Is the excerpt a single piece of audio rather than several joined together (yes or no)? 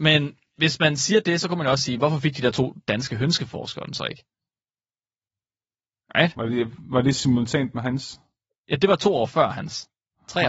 yes